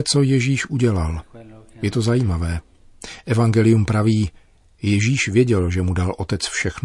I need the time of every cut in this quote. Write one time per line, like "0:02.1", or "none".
none